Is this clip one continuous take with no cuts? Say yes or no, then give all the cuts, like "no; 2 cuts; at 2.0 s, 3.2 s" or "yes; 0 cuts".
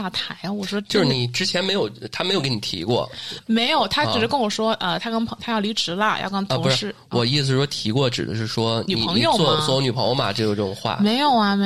yes; 0 cuts